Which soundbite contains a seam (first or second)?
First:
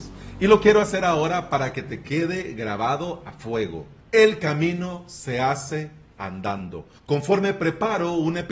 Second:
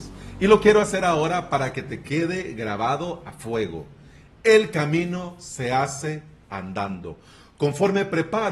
first